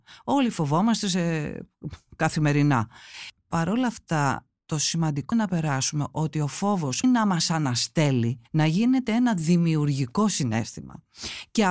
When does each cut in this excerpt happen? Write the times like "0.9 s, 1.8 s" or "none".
5.3 s, 7.0 s, 8.5 s